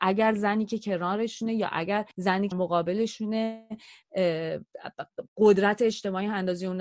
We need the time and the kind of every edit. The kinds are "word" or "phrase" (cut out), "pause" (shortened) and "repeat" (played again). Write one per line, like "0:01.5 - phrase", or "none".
0:02.1 - pause
0:02.5 - word
0:05.3 - pause